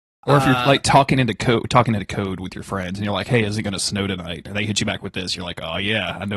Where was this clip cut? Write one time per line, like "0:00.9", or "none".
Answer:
none